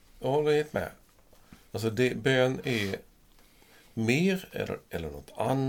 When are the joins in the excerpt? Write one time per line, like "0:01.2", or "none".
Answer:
0:01.7